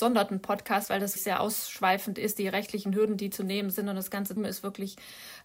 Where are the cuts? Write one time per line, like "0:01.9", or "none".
0:01.2
0:04.4